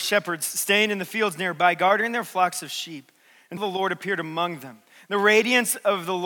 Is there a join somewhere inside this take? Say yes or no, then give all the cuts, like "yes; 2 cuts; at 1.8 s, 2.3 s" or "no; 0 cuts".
yes; 1 cut; at 3.6 s